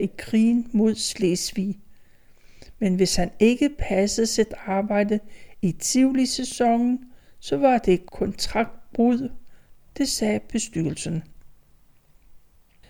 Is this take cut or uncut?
uncut